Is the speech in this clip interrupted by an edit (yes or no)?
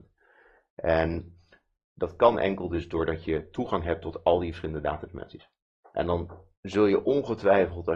no